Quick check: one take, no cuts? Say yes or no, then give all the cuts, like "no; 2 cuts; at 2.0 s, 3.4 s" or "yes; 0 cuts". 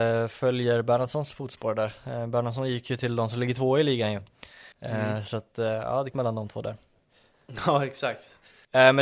no; 2 cuts; at 4.7 s, 6.1 s